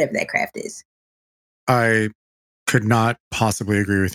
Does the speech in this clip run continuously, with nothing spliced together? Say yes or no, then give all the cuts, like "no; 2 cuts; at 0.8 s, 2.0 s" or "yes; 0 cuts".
yes; 0 cuts